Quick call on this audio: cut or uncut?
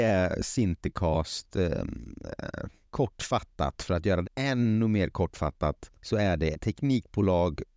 cut